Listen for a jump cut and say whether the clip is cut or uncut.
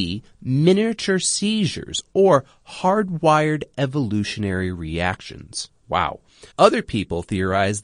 cut